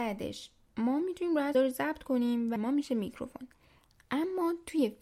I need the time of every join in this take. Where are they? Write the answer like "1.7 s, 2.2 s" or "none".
1.5 s, 2.6 s